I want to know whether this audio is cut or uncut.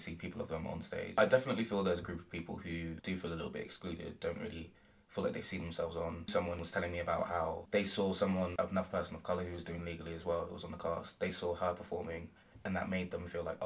uncut